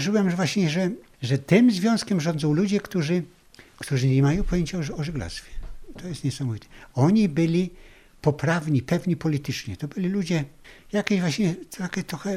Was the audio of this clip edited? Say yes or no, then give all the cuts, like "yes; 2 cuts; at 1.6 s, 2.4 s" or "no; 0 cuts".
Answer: yes; 1 cut; at 3.7 s